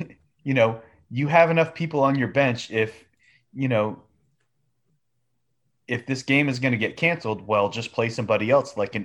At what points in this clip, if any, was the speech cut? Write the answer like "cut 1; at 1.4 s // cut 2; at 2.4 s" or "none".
none